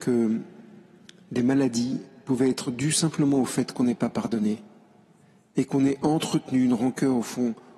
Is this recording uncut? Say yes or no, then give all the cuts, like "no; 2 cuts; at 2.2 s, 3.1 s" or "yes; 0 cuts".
yes; 0 cuts